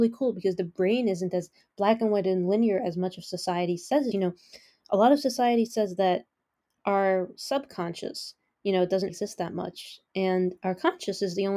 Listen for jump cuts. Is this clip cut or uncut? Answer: cut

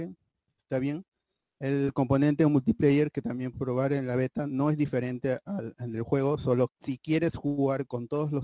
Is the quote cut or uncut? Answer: cut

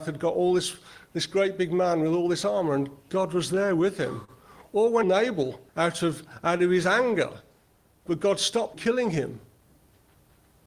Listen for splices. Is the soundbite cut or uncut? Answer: cut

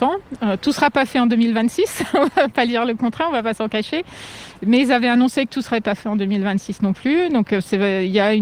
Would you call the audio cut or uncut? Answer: uncut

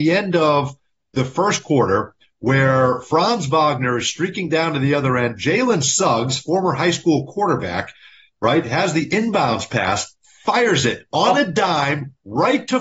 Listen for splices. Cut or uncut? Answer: uncut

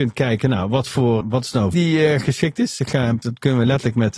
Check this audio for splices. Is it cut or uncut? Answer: cut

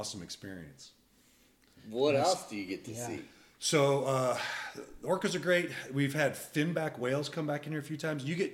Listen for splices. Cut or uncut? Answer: uncut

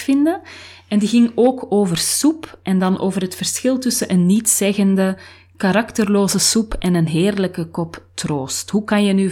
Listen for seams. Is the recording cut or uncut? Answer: uncut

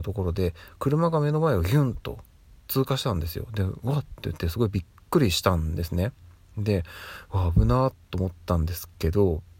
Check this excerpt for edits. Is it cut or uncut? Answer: uncut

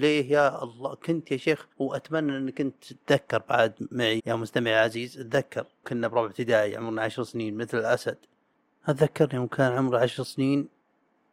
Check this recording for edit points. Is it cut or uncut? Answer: cut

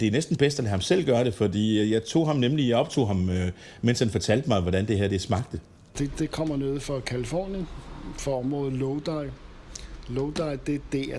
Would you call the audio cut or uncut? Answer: uncut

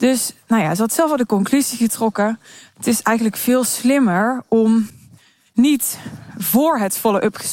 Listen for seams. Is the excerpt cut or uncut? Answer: uncut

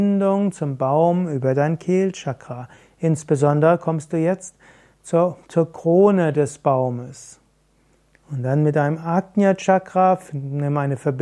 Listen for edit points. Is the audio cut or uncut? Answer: uncut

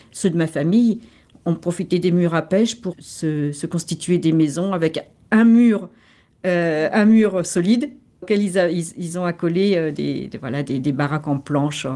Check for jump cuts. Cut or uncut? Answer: cut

